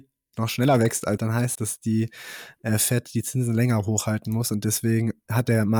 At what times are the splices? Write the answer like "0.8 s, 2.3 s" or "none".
1.2 s, 1.6 s